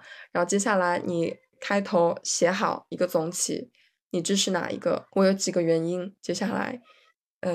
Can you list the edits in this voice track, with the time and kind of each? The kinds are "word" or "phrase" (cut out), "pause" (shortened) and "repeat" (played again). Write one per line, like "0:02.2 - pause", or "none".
0:05.1 - pause

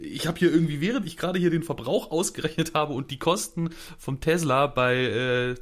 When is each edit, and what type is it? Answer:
0:01.0 - phrase

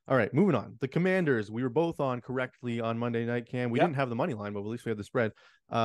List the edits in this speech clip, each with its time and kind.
none

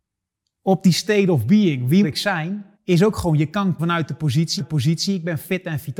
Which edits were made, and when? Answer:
0:02.0 - word
0:02.7 - pause
0:03.8 - word
0:04.6 - repeat

